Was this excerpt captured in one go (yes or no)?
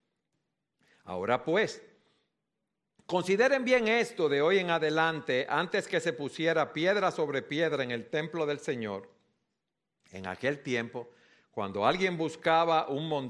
yes